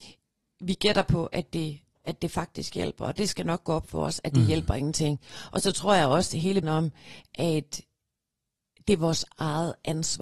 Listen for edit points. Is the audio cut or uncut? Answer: cut